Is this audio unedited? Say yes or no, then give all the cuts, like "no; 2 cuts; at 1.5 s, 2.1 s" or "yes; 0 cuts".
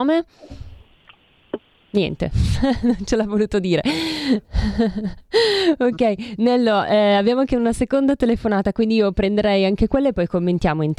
yes; 0 cuts